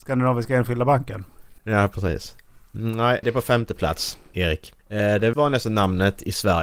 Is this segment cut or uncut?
cut